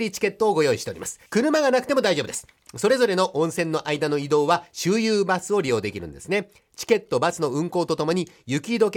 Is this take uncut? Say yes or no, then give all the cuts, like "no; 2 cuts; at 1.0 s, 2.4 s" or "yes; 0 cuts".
no; 1 cut; at 1.3 s